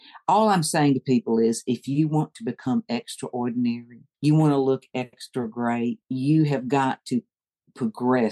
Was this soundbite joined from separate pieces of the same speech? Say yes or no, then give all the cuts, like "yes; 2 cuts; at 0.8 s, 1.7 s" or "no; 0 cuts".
yes; 2 cuts; at 4.1 s, 6.0 s